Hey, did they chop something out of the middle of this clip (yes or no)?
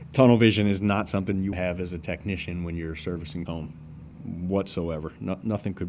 yes